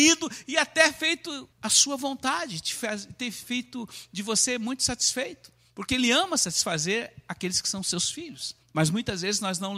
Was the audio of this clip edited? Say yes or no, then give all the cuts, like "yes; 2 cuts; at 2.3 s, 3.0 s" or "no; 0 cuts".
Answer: yes; 2 cuts; at 1.5 s, 8.6 s